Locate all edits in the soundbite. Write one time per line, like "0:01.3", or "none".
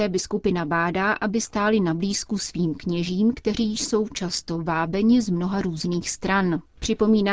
none